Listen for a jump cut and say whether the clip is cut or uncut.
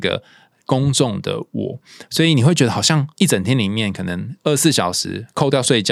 cut